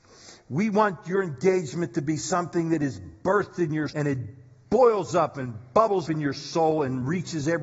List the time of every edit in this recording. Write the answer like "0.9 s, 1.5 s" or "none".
3.9 s, 6.0 s